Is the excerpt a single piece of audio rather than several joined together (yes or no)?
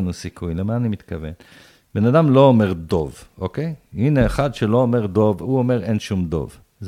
yes